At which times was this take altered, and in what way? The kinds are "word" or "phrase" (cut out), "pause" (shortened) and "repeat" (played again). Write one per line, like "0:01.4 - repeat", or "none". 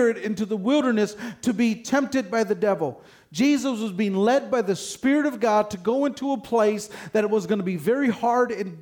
none